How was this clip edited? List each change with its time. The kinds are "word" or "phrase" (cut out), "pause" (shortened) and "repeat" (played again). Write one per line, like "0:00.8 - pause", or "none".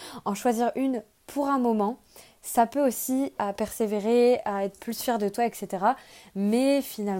0:03.4 - phrase